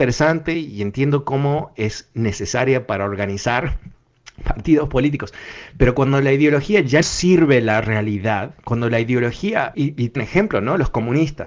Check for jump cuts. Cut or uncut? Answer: cut